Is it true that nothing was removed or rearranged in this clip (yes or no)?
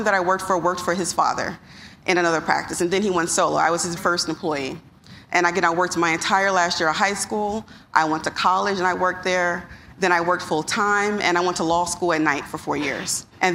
no